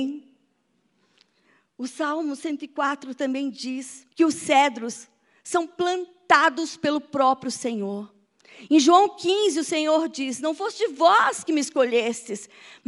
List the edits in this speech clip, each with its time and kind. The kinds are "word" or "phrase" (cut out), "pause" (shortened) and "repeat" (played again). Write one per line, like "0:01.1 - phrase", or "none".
0:04.1 - pause